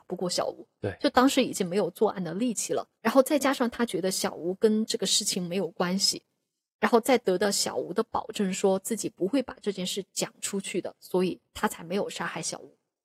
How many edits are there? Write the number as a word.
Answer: two